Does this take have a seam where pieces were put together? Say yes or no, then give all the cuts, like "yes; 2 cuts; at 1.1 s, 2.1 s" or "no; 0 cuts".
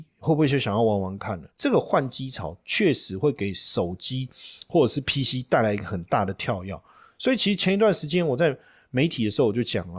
yes; 1 cut; at 1.5 s